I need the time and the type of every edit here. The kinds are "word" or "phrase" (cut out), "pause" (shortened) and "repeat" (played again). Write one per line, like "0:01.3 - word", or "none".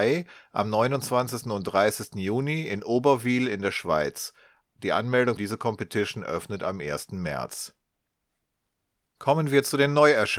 0:05.4 - word